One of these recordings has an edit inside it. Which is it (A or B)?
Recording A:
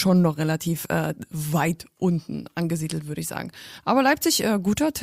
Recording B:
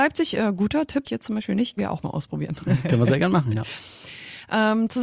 B